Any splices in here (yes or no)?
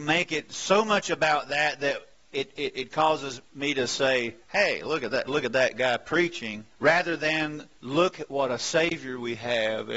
yes